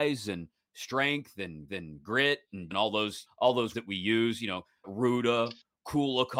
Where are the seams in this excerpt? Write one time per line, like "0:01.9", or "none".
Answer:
0:01.7
0:02.7
0:03.3
0:03.7
0:04.8